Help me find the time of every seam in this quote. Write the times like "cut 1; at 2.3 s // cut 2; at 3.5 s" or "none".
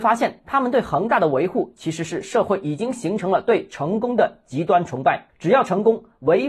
cut 1; at 5.3 s